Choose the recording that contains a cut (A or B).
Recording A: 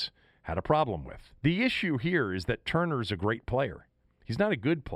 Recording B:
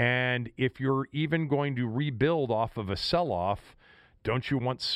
A